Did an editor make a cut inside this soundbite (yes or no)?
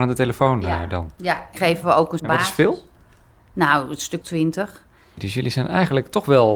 yes